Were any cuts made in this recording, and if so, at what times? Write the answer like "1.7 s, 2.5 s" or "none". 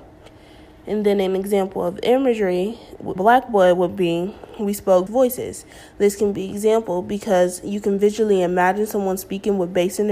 3.2 s, 5.1 s